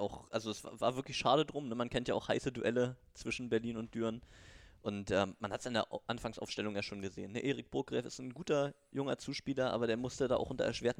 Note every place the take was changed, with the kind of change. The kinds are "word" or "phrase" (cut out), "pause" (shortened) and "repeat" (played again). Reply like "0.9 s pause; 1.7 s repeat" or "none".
none